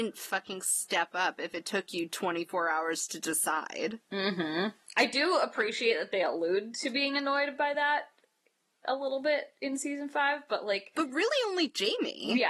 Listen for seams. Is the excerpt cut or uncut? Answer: uncut